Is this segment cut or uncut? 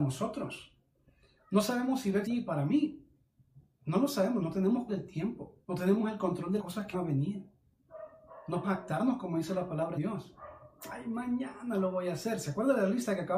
cut